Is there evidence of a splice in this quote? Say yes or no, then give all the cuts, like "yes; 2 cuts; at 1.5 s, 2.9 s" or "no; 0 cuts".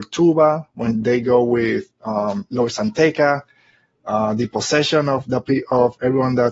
no; 0 cuts